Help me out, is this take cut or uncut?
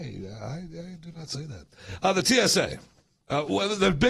uncut